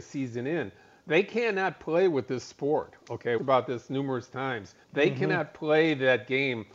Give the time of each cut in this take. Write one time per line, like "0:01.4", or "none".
0:03.4
0:04.8